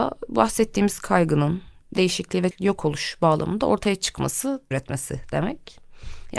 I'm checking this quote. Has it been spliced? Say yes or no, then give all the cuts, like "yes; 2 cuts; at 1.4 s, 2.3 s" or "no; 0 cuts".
yes; 3 cuts; at 1.8 s, 2.5 s, 4.7 s